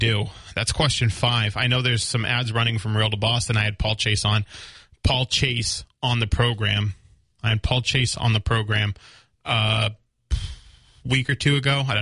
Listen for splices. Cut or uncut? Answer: uncut